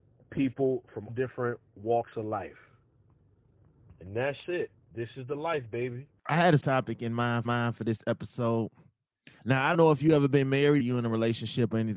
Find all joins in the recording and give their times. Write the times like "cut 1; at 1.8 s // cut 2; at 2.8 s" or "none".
cut 1; at 1.1 s // cut 2; at 4.8 s // cut 3; at 6.2 s // cut 4; at 6.6 s // cut 5; at 7.4 s // cut 6; at 9.4 s // cut 7; at 9.7 s // cut 8; at 10.8 s